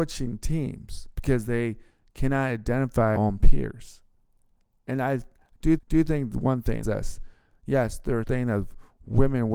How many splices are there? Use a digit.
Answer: 5